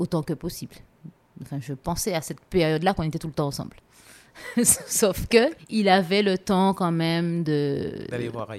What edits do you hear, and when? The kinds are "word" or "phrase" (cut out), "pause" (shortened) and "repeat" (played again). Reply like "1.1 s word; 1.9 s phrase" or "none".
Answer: none